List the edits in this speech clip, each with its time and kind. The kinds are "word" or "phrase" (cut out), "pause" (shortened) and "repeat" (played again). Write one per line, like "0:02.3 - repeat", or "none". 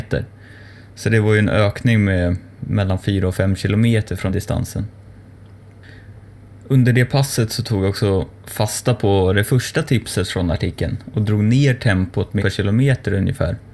0:04.3 - phrase
0:08.4 - pause
0:12.4 - phrase

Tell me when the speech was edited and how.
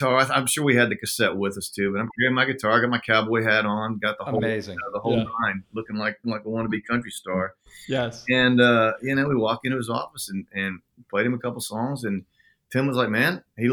0:06.2 - word

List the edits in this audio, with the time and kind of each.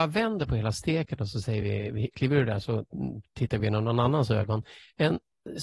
none

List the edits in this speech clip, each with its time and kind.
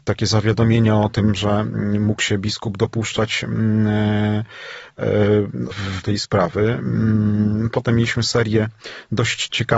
0:05.7 - word
0:06.0 - word

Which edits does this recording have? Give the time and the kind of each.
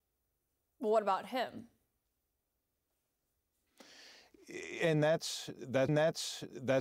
0:05.9 - repeat

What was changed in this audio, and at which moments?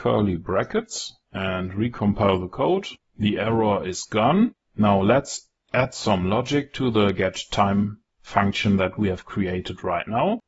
0:01.2 - pause

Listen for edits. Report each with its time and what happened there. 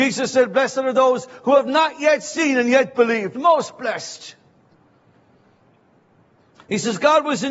none

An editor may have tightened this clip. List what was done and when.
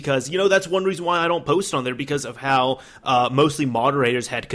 none

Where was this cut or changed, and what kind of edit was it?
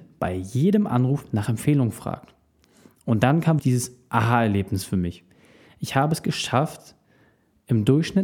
0:03.6 - word

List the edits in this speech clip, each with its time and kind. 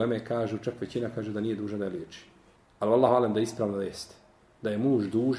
none

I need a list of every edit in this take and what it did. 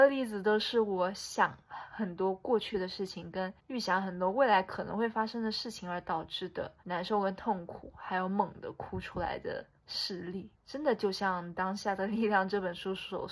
0:03.6 - pause
0:06.8 - pause
0:09.8 - pause
0:10.6 - pause

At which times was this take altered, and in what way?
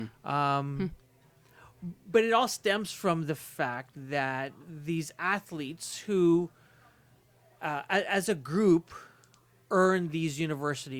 none

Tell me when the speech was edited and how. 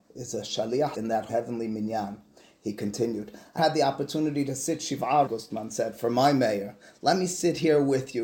0:00.9 - word
0:01.3 - word
0:03.6 - word
0:05.3 - word

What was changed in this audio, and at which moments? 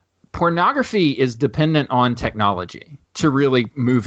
0:03.0 - pause

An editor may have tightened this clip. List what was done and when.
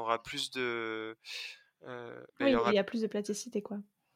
0:02.3 - pause

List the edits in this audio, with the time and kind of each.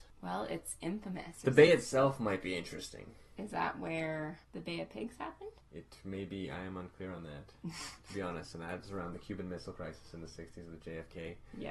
none

